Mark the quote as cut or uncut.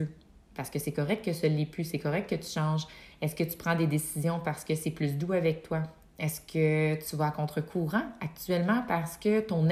uncut